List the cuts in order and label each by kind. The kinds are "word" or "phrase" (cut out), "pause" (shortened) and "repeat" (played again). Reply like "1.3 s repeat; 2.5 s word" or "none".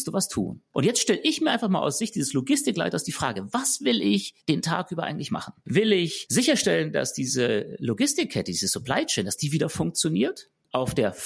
4.4 s pause